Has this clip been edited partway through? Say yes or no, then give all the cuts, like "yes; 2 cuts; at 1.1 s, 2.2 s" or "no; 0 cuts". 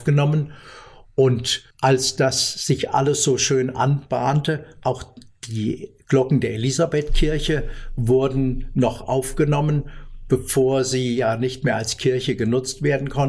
yes; 1 cut; at 1.7 s